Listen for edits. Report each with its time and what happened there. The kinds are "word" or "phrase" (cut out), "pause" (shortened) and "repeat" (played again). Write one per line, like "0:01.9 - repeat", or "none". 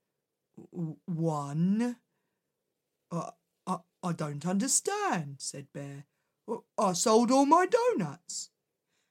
none